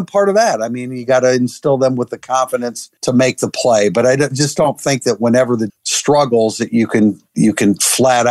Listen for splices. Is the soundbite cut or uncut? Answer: cut